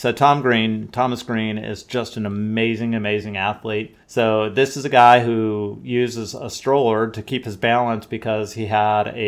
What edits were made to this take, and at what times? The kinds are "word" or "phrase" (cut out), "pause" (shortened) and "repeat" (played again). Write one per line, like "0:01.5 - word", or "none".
0:04.0 - pause